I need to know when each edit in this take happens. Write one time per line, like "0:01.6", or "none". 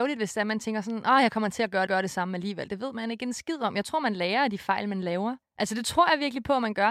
0:01.9
0:05.4